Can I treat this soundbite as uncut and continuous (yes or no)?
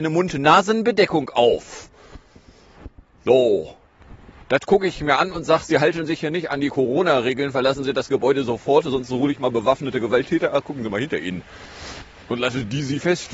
yes